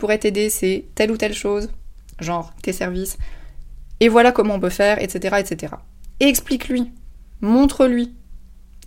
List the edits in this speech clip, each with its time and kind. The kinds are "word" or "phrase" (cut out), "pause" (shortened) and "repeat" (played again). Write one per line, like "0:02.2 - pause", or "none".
none